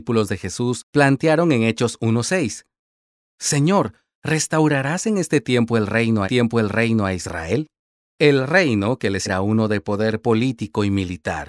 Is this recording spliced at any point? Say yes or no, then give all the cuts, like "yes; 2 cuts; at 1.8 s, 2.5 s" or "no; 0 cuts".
yes; 3 cuts; at 6.2 s, 7.8 s, 9.3 s